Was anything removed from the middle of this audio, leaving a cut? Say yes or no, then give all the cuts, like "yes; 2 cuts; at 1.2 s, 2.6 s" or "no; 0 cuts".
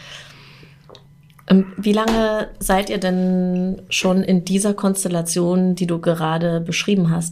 no; 0 cuts